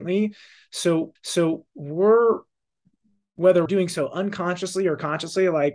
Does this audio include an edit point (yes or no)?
yes